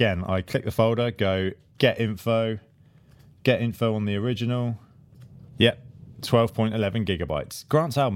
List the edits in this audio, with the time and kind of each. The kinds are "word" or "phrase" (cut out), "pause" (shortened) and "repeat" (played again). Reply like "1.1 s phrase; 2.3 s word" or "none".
none